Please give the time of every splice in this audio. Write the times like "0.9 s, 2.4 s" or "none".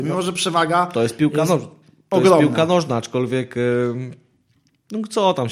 none